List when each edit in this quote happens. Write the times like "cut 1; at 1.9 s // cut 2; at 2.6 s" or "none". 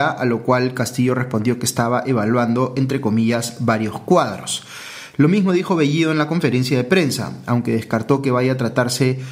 none